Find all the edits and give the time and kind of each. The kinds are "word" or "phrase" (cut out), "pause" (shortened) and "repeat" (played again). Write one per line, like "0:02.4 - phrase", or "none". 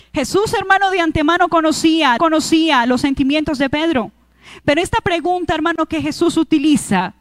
0:02.2 - repeat